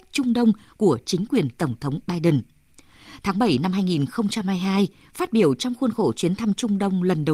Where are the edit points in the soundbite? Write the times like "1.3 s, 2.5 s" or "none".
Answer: none